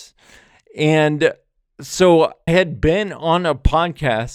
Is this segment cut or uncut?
cut